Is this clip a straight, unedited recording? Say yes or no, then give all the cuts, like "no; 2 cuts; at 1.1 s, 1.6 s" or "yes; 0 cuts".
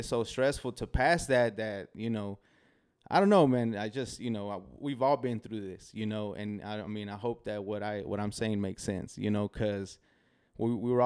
yes; 0 cuts